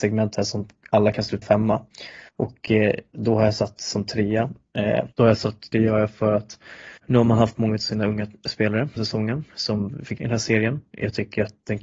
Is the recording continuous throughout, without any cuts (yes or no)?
no